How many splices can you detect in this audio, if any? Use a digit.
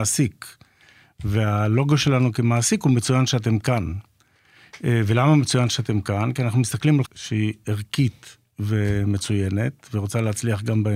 1